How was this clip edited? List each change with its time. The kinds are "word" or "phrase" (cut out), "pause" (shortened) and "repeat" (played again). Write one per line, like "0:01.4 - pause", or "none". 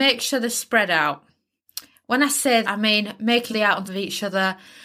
0:02.6 - word
0:03.5 - word
0:03.8 - word